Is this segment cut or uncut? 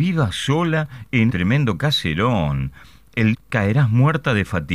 cut